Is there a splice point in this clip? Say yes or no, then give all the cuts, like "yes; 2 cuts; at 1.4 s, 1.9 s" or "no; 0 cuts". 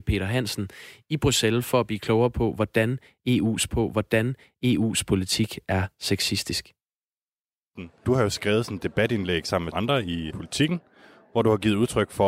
yes; 4 cuts; at 3.7 s, 7.4 s, 9.7 s, 10.3 s